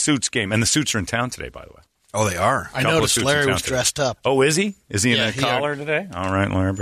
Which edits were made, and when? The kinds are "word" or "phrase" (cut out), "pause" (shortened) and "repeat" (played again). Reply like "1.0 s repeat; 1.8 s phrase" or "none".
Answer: none